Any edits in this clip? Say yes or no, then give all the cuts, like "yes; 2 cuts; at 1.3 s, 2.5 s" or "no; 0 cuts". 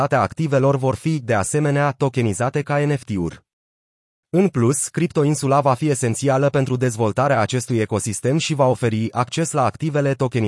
no; 0 cuts